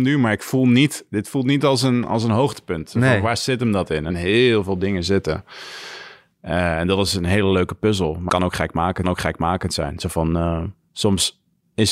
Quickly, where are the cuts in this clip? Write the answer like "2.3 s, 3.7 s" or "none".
4.1 s, 8.3 s, 9.0 s